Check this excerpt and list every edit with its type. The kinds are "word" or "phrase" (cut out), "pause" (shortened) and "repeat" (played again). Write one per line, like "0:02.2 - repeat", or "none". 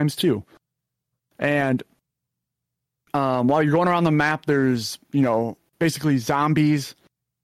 none

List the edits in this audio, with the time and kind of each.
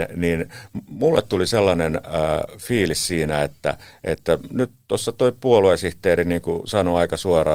none

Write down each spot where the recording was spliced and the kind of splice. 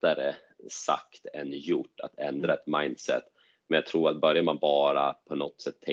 none

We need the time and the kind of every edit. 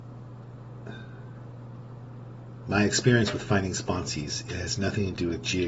none

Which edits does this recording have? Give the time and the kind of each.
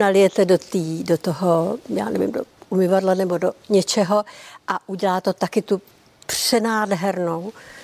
none

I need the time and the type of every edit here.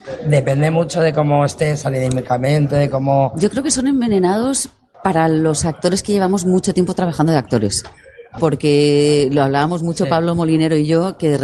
none

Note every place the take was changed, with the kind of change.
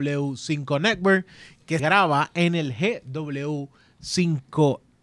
0:01.8 - word

